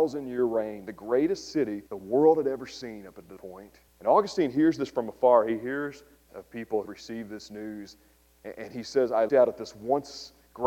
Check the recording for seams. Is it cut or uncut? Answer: cut